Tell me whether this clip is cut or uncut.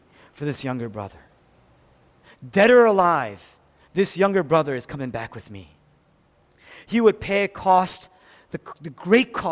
uncut